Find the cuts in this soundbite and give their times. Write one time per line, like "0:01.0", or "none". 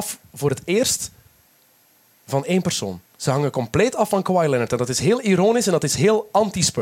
0:03.1